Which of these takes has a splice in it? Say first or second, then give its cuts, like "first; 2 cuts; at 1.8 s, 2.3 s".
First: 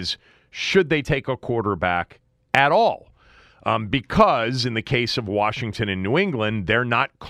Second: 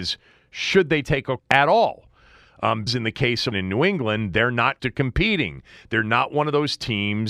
second; 4 cuts; at 1.4 s, 2.9 s, 3.5 s, 4.8 s